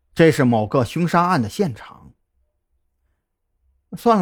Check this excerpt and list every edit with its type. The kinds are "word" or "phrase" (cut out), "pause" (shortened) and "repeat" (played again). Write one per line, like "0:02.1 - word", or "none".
none